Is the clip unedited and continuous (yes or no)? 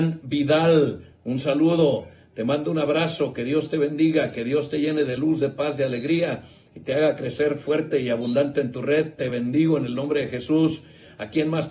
yes